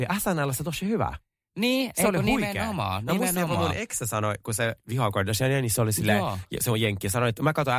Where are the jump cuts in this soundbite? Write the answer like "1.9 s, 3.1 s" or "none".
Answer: none